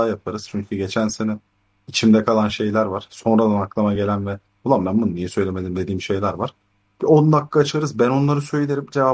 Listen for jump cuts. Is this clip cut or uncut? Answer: uncut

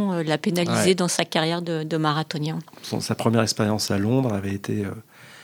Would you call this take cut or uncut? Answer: uncut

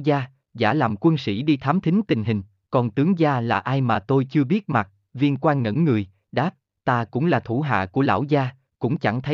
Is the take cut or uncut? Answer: uncut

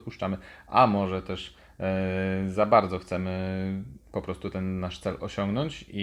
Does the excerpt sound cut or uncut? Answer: uncut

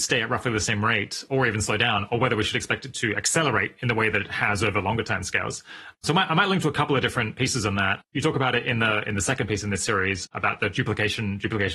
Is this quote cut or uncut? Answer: uncut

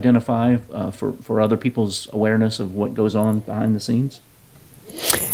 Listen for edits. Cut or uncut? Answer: uncut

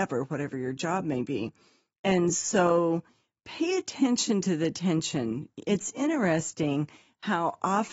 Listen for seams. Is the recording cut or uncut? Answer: uncut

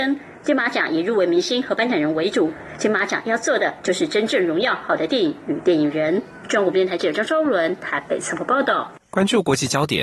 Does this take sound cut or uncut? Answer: cut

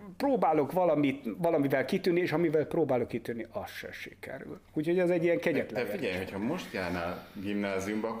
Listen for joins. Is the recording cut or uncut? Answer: uncut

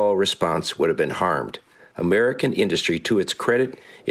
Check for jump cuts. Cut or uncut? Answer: uncut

